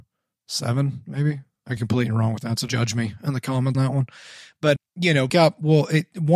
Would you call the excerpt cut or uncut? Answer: cut